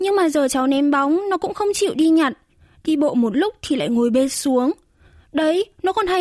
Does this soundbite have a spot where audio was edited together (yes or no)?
no